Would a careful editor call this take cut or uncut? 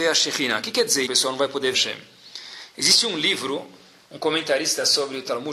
cut